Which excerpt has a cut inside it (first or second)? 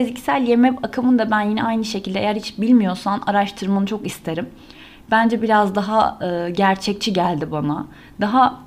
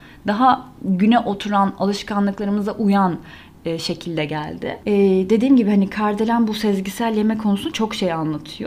second